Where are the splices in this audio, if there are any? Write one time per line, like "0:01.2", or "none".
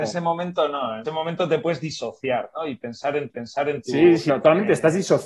0:01.0
0:03.3
0:04.3